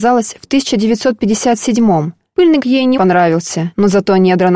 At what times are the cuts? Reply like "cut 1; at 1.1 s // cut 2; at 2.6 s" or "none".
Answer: cut 1; at 2.6 s // cut 2; at 3.0 s